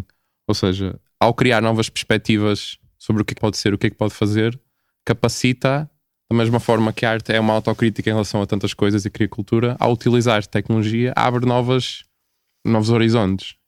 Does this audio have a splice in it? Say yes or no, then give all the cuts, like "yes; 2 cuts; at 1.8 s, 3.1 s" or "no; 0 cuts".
yes; 1 cut; at 3.4 s